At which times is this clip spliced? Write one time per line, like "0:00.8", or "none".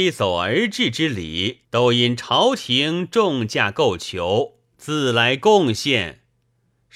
0:01.6